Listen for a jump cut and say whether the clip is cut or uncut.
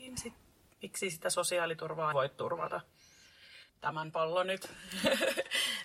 cut